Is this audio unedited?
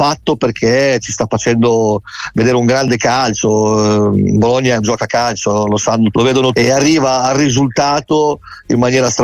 no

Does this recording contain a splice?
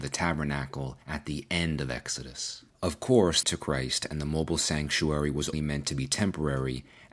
yes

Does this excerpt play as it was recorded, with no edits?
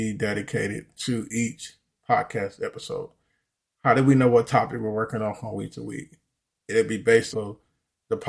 no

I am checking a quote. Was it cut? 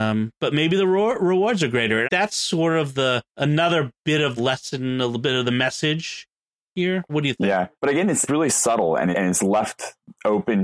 yes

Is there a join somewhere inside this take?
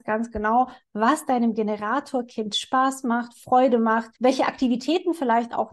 yes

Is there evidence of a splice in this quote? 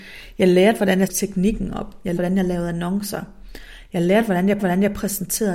yes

